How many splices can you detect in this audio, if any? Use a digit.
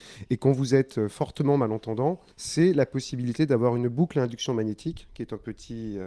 1